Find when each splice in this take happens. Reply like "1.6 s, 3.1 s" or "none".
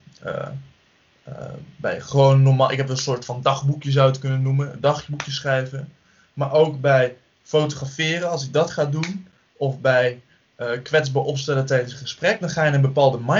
none